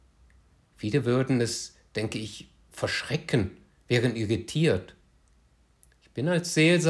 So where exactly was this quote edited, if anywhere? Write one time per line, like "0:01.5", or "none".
none